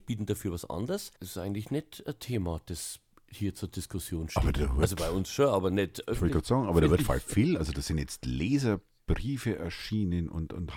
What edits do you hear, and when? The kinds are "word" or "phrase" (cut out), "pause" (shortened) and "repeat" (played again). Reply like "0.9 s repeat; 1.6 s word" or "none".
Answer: 1.2 s pause